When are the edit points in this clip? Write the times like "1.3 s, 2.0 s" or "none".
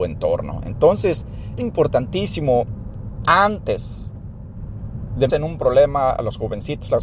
1.6 s, 3.3 s, 5.3 s